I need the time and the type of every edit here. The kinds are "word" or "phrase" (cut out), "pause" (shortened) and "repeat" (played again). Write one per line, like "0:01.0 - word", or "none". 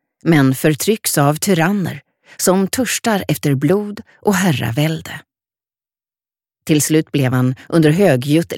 none